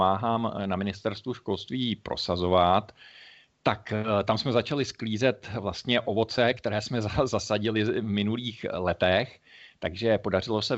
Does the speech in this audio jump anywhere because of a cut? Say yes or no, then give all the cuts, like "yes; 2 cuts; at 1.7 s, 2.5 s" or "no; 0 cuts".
no; 0 cuts